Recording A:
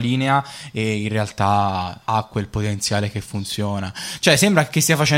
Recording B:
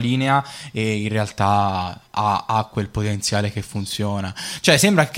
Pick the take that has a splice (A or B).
A